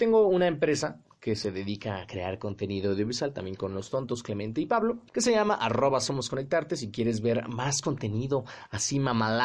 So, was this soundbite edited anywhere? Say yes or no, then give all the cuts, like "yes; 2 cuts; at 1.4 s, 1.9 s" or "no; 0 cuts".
yes; 1 cut; at 5.1 s